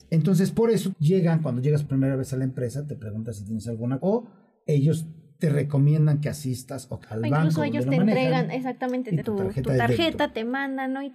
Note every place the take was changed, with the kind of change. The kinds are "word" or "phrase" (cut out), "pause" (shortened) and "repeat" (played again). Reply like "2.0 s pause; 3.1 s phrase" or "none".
0.9 s word; 1.9 s word; 4.0 s word; 7.0 s word; 9.2 s word